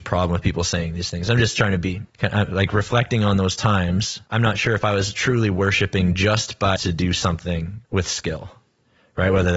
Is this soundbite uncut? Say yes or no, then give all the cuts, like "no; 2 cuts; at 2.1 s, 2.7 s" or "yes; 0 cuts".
no; 4 cuts; at 2.1 s, 4.3 s, 6.8 s, 7.8 s